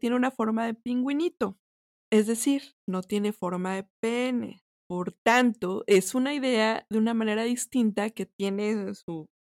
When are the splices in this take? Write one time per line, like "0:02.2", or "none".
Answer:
0:01.9
0:04.7